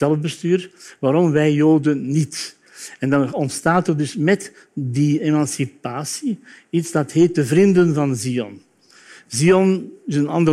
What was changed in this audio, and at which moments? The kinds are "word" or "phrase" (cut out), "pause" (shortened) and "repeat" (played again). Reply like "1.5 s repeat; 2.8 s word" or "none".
none